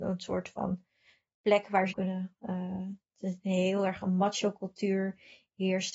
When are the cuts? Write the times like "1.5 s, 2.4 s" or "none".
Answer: 1.9 s